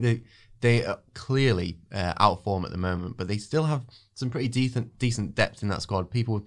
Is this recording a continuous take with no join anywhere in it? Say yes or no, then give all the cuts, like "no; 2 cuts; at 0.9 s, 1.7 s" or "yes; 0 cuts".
yes; 0 cuts